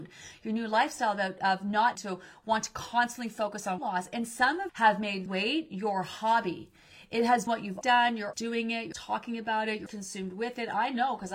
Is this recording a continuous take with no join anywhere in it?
no; 9 cuts; at 2.0 s, 3.8 s, 4.7 s, 5.3 s, 7.5 s, 7.8 s, 8.3 s, 8.9 s, 9.9 s

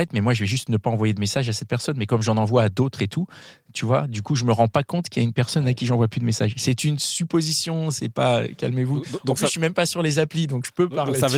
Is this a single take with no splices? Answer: yes; 0 cuts

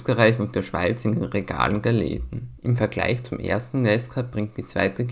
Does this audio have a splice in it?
no; 0 cuts

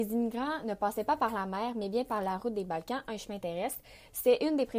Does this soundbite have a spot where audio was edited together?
no; 0 cuts

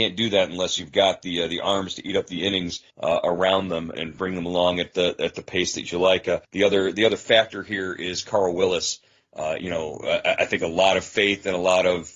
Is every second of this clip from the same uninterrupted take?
no; 3 cuts; at 2.9 s, 3.9 s, 6.4 s

